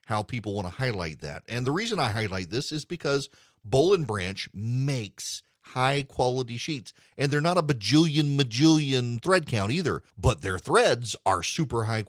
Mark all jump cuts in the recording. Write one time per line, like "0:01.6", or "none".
0:10.1